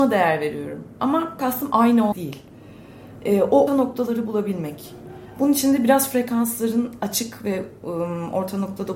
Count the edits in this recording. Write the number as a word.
three